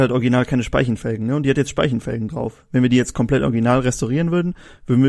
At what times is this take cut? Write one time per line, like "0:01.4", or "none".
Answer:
none